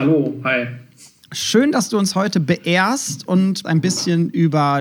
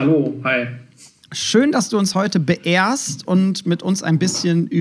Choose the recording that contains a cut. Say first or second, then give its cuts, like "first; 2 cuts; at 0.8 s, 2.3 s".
first; 1 cut; at 3.6 s